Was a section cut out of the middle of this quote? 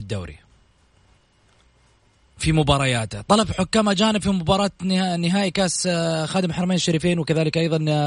no; 0 cuts

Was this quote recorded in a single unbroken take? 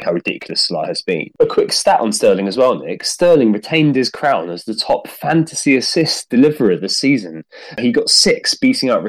yes; 0 cuts

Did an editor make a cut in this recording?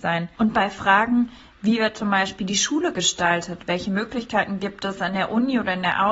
no; 0 cuts

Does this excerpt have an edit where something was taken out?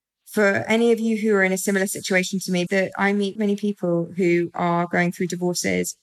yes; 2 cuts; at 2.7 s, 3.4 s

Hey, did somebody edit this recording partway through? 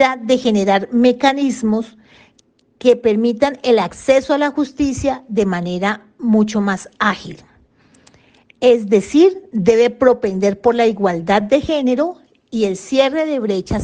no; 0 cuts

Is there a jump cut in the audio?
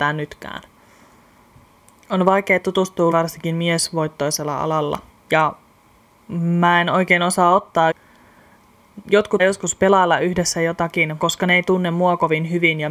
yes; 5 cuts; at 3.1 s, 5.1 s, 7.9 s, 9.4 s, 11.2 s

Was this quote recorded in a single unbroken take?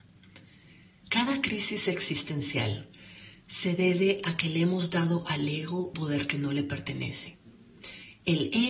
no; 1 cut; at 5.9 s

